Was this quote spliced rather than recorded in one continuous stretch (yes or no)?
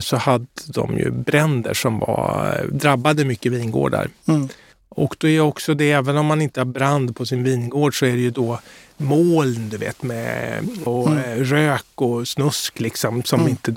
yes